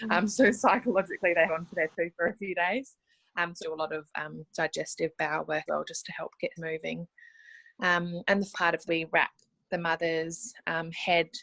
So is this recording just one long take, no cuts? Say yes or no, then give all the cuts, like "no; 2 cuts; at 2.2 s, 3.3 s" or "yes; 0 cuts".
no; 6 cuts; at 1.5 s, 3.6 s, 5.7 s, 6.6 s, 8.5 s, 8.9 s